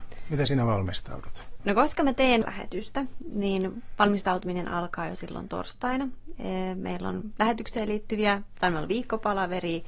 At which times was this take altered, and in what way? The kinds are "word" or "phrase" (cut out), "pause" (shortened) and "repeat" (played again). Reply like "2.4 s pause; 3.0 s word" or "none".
2.4 s phrase